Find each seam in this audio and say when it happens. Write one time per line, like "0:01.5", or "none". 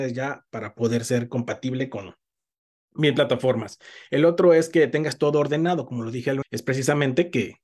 0:06.4